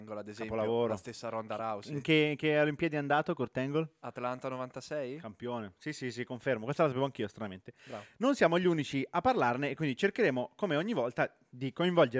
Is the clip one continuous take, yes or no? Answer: yes